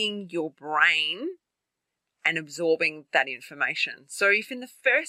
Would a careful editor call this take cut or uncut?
uncut